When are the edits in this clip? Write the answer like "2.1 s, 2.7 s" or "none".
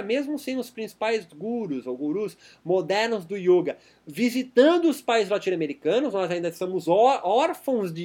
none